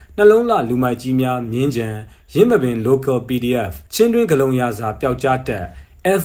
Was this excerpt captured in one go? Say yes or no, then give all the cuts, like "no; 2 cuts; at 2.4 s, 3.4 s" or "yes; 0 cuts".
no; 1 cut; at 3.9 s